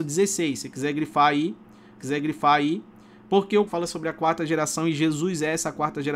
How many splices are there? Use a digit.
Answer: 2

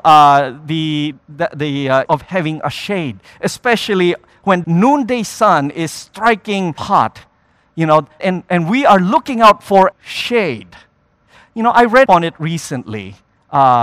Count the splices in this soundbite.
7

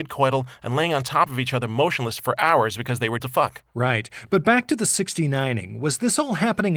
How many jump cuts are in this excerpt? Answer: 1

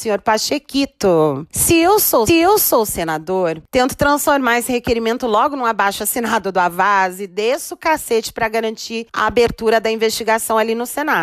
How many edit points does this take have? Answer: 1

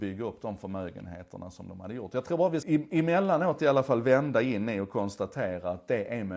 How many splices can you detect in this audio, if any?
1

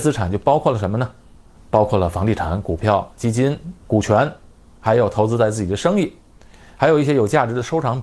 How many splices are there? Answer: 0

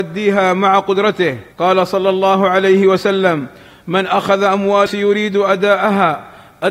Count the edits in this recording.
2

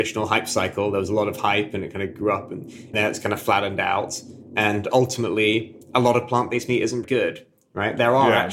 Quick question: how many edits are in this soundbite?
2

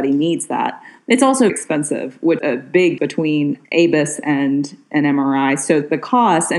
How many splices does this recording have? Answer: 4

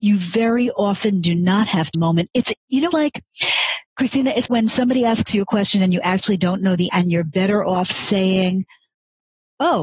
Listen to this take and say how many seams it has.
4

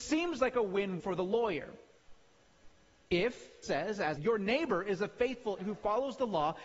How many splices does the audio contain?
4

